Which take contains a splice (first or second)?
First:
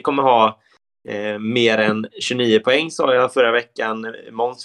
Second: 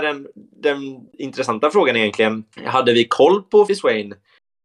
second